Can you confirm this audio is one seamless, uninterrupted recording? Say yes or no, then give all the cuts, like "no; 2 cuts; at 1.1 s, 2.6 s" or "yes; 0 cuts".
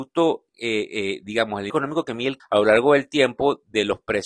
no; 2 cuts; at 1.7 s, 2.4 s